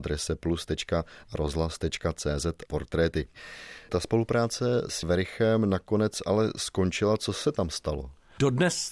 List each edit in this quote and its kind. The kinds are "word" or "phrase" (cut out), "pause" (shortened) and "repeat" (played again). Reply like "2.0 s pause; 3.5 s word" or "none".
2.7 s word; 5.0 s word